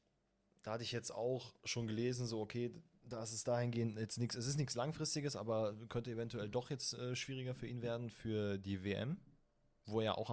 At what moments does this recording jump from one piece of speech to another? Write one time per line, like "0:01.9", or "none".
none